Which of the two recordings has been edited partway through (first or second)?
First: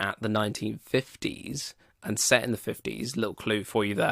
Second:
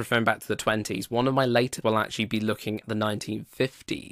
second